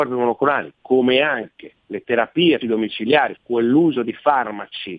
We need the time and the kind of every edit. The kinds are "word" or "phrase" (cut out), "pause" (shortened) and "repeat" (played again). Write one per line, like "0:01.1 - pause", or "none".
0:01.8 - pause
0:02.6 - word
0:03.4 - word